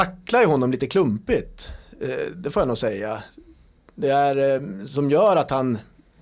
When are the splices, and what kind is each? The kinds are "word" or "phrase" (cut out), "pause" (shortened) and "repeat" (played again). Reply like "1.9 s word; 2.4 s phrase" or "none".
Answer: none